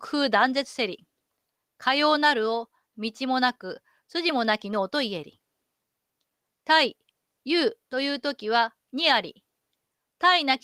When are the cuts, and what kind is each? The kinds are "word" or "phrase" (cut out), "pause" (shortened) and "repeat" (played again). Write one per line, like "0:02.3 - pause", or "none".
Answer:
none